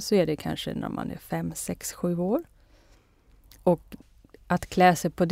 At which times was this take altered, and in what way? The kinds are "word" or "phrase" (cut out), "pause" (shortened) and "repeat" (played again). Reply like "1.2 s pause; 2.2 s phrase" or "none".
none